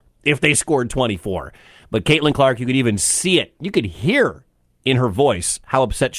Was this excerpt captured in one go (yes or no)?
yes